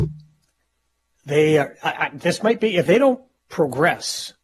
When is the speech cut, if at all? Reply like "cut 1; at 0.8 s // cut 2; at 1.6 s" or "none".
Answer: cut 1; at 2.9 s